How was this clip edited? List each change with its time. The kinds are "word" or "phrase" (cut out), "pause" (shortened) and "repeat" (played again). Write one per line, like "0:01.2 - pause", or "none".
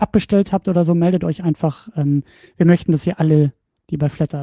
none